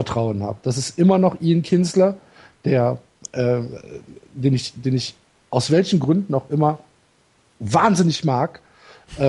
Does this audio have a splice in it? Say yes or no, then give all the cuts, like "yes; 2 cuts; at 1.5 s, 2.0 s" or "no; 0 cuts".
no; 0 cuts